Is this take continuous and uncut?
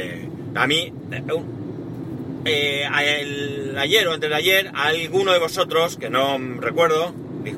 yes; 0 cuts

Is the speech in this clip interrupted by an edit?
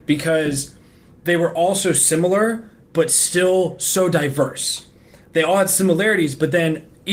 no; 0 cuts

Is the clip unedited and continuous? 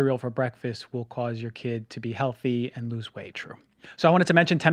no; 1 cut; at 3.3 s

